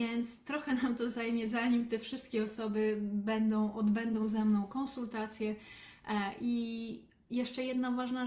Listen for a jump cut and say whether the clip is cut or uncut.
uncut